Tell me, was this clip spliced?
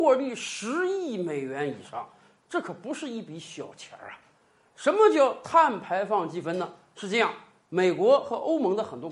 no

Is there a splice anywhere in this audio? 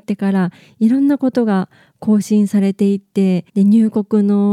yes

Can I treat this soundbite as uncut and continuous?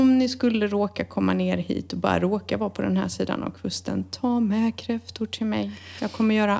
yes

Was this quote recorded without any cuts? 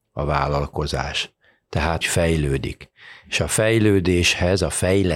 no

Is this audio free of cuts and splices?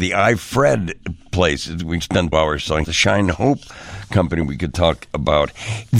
no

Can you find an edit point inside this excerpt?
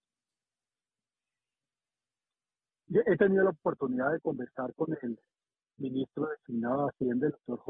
no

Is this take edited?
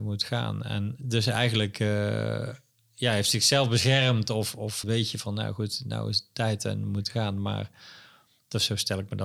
yes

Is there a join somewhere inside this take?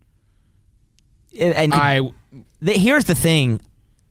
yes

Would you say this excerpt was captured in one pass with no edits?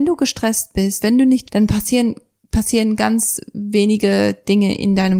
no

